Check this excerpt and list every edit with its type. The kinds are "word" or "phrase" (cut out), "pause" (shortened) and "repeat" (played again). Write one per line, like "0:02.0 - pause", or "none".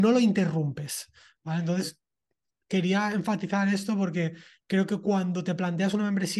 none